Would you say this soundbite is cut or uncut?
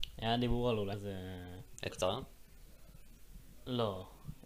cut